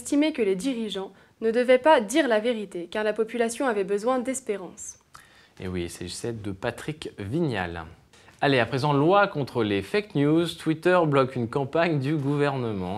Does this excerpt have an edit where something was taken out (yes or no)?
no